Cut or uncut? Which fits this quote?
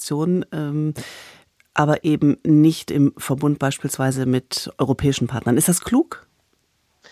uncut